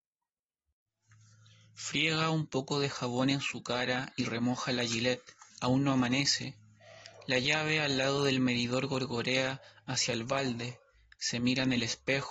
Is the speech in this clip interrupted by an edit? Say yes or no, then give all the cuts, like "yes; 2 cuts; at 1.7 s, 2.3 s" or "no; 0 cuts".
yes; 1 cut; at 5.5 s